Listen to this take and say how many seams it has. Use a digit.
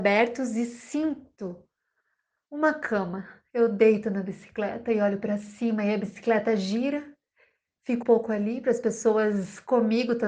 1